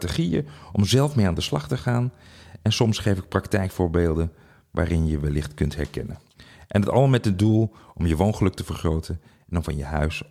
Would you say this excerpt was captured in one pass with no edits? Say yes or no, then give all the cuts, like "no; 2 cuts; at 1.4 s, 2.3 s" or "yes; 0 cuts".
yes; 0 cuts